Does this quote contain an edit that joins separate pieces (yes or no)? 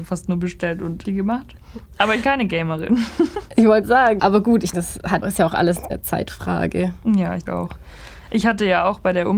yes